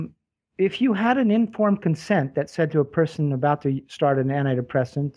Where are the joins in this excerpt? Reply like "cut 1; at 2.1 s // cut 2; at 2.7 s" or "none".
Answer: none